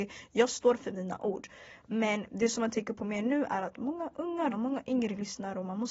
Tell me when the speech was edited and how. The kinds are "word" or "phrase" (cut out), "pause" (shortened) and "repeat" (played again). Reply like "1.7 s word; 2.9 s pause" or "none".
4.5 s word